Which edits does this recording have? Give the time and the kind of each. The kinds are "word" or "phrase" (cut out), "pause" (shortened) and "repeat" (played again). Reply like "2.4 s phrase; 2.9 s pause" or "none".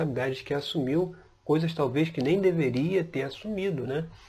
none